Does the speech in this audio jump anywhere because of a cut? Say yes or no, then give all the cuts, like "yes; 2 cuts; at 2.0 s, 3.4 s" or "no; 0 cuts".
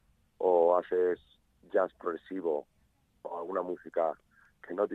no; 0 cuts